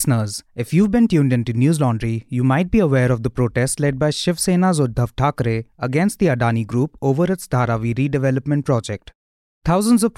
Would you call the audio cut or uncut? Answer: uncut